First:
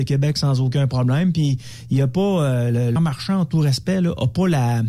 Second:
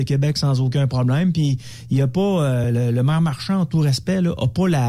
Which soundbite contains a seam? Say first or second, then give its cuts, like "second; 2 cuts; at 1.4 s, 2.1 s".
first; 1 cut; at 3.0 s